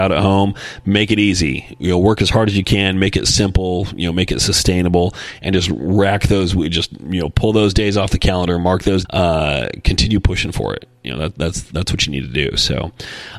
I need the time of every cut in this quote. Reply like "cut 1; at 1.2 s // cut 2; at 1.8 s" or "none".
cut 1; at 9.0 s